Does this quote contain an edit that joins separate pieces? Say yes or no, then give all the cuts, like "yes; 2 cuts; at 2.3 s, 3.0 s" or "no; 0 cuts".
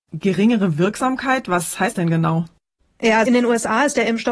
yes; 2 cuts; at 1.9 s, 3.3 s